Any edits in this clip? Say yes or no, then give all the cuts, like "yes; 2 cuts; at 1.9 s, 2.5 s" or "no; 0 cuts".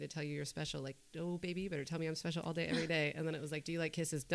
no; 0 cuts